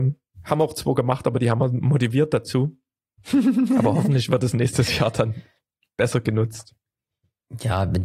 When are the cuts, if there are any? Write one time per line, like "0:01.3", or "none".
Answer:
none